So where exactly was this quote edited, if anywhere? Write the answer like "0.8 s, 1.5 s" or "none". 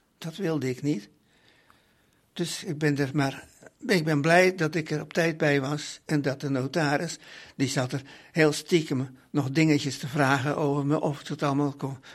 3.8 s